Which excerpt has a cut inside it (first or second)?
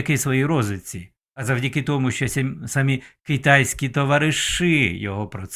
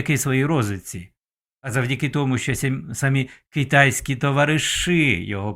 first